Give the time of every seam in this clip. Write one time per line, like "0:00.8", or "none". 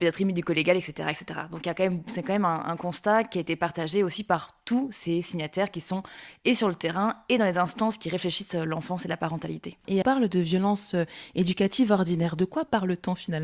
0:10.0